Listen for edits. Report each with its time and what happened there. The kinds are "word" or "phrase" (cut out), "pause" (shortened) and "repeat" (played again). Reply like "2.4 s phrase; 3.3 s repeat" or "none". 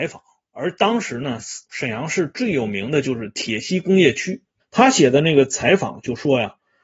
1.6 s pause; 4.6 s pause